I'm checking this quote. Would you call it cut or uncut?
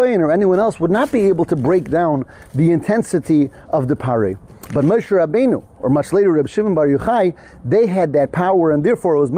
uncut